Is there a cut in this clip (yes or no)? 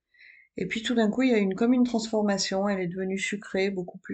no